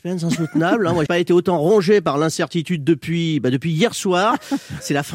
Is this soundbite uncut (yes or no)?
no